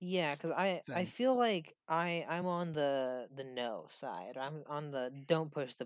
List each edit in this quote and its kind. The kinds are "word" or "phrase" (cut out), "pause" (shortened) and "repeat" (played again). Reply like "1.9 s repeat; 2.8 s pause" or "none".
none